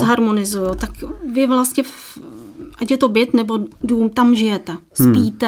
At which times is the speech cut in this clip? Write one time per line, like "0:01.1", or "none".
0:03.7